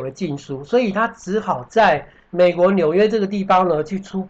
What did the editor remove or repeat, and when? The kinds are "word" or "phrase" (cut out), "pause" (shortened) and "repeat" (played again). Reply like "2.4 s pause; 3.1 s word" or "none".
2.2 s pause